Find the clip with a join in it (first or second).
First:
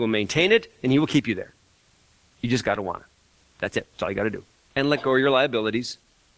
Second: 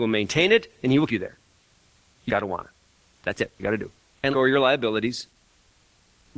second